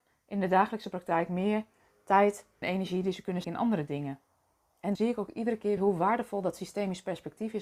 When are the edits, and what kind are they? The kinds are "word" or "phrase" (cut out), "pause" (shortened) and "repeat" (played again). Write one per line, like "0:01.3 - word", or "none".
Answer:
0:02.6 - word
0:03.4 - word
0:05.0 - word
0:05.8 - word